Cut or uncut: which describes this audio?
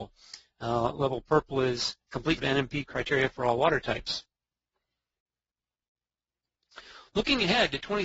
cut